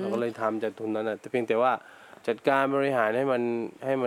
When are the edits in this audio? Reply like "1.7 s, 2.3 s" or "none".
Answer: none